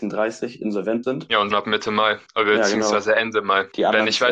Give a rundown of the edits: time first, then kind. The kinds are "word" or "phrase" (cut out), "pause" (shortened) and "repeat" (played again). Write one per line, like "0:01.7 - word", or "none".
0:01.0 - word
0:01.5 - phrase